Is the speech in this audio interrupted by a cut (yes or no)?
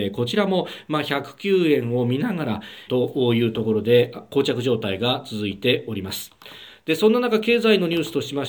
yes